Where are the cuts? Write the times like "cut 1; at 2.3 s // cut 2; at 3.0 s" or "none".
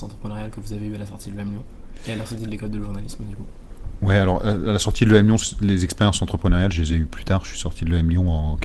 none